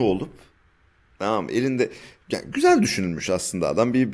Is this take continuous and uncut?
yes; 0 cuts

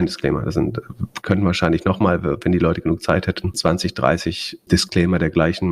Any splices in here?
no; 0 cuts

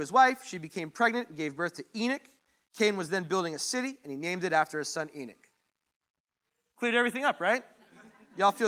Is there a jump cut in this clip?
no; 0 cuts

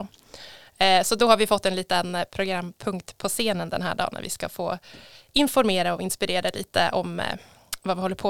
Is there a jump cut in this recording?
no; 0 cuts

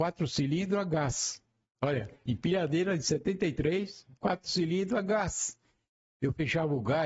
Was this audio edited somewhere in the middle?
yes; 1 cut; at 4.2 s

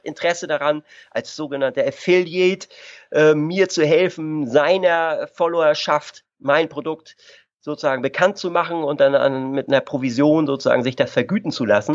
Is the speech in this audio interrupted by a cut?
no; 0 cuts

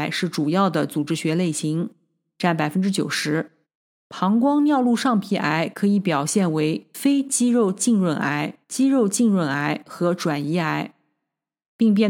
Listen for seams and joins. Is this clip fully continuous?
no; 2 cuts; at 3.6 s, 8.6 s

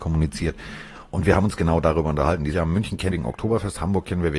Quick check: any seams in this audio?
yes; 2 cuts; at 2.5 s, 3.1 s

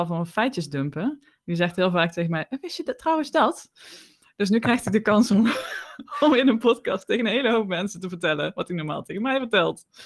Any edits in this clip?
no; 0 cuts

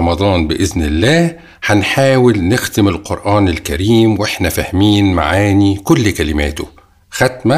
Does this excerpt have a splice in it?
no; 0 cuts

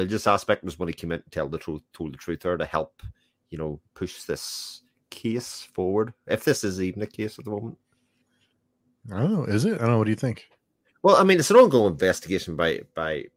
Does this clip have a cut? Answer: yes; 1 cut; at 3.8 s

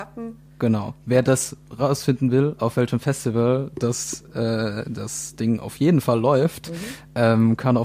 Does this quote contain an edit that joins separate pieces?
no; 0 cuts

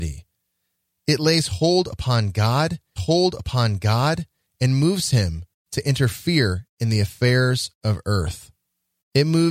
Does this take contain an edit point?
yes; 1 cut; at 3.0 s

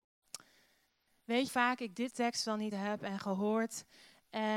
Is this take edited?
yes; 3 cuts; at 1.5 s, 2.1 s, 2.7 s

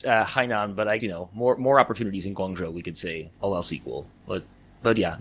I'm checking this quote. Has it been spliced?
yes; 2 cuts; at 1.0 s, 3.3 s

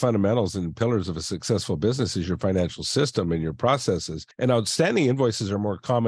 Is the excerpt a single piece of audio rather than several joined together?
yes; 0 cuts

